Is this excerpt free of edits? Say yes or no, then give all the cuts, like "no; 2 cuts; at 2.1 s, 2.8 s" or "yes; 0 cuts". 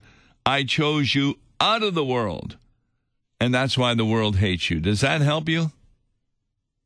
yes; 0 cuts